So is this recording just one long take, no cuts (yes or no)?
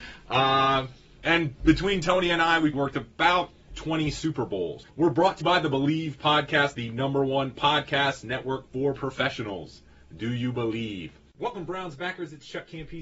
no